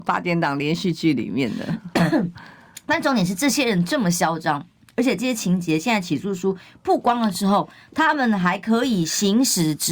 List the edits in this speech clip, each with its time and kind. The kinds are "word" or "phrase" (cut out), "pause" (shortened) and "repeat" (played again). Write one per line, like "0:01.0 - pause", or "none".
none